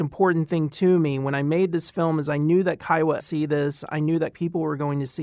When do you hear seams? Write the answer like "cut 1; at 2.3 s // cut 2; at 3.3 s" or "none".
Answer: cut 1; at 3.2 s // cut 2; at 4.3 s